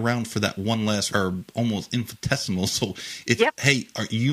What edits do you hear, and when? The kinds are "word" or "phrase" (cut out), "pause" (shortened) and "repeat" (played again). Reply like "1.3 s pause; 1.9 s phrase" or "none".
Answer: 1.1 s word; 3.4 s word